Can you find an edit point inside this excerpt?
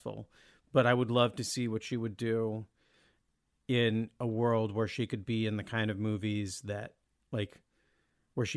no; 0 cuts

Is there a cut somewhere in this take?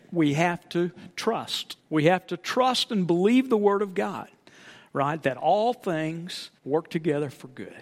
yes; 2 cuts; at 1.8 s, 6.6 s

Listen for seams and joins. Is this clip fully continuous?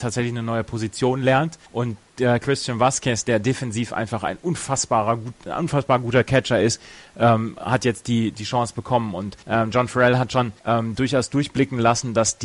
no; 3 cuts; at 1.7 s, 9.4 s, 10.6 s

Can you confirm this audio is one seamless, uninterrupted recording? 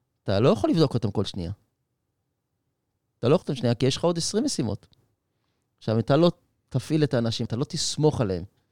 no; 2 cuts; at 3.4 s, 7.4 s

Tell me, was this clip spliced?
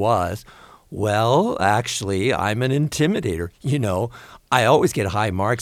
no; 0 cuts

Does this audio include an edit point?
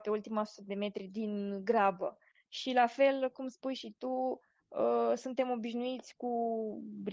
no; 0 cuts

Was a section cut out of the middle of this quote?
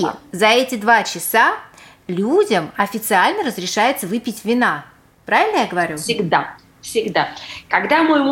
no; 0 cuts

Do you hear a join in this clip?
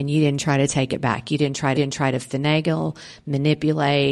yes; 1 cut; at 1.7 s

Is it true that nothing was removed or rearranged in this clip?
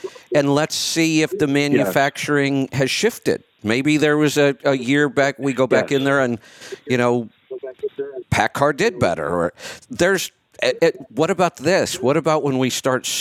yes; 0 cuts

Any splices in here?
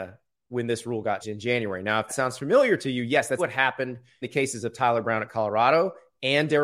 yes; 4 cuts; at 1.2 s, 2.1 s, 3.4 s, 4.2 s

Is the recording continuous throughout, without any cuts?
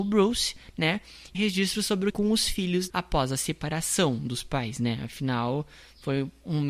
no; 3 cuts; at 1.3 s, 2.1 s, 2.9 s

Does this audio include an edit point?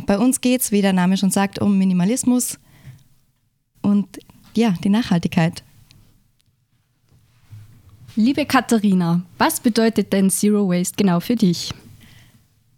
no; 0 cuts

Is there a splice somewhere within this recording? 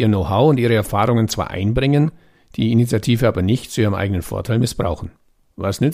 no; 0 cuts

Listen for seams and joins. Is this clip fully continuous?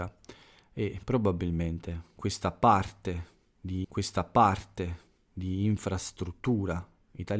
no; 1 cut; at 3.8 s

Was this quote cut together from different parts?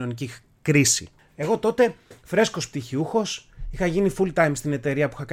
no; 0 cuts

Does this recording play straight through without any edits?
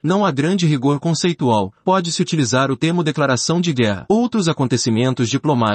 yes; 0 cuts

